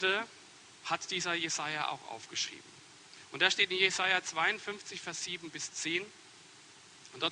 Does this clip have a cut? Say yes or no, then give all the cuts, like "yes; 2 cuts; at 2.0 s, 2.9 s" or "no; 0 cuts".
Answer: no; 0 cuts